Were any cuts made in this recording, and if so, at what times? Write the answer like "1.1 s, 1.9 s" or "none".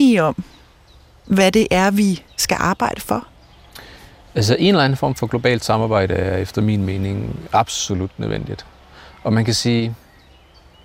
none